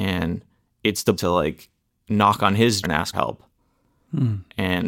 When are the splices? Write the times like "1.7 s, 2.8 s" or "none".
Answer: 1.2 s, 2.8 s, 3.1 s